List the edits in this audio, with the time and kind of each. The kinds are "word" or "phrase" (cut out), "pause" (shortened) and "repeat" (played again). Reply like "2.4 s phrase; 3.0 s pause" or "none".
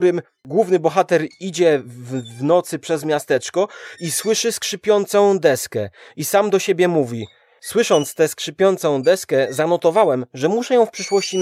none